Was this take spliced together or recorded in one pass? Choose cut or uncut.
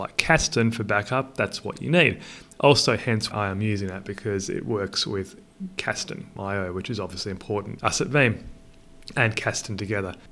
cut